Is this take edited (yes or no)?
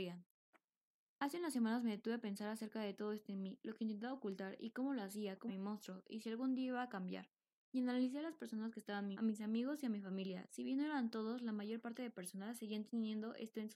yes